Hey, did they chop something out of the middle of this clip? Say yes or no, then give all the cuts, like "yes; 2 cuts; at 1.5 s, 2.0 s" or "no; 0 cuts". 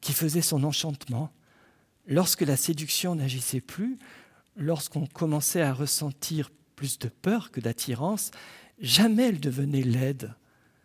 no; 0 cuts